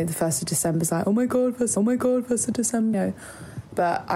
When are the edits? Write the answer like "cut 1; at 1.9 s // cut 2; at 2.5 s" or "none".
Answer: cut 1; at 1.8 s // cut 2; at 2.9 s